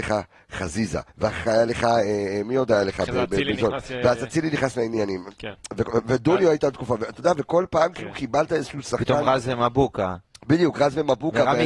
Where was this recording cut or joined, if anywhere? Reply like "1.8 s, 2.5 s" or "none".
1.1 s